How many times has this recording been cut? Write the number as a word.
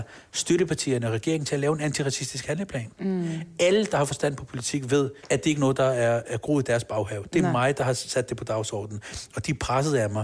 one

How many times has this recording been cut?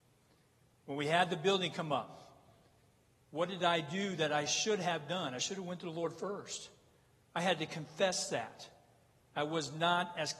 zero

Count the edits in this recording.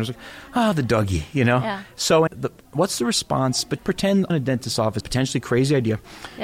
four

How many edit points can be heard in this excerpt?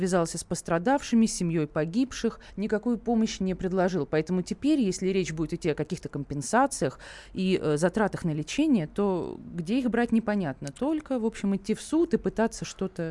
zero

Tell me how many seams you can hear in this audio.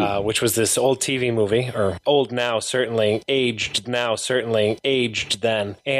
one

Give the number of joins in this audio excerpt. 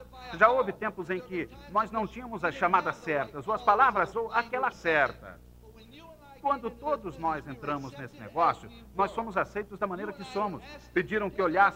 two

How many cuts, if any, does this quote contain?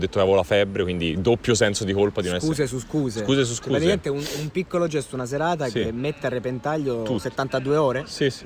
zero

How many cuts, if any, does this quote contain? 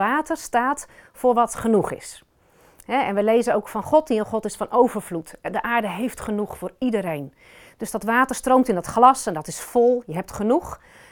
zero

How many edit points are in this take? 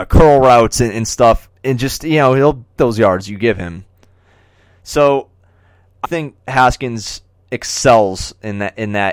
three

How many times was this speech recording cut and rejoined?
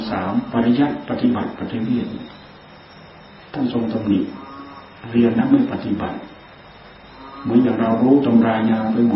zero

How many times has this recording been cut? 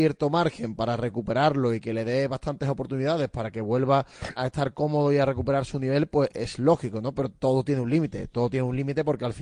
one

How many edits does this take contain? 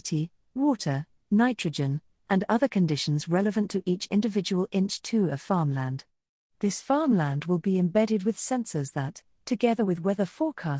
zero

